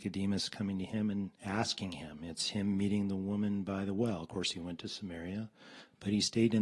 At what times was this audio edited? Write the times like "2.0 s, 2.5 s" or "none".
1.4 s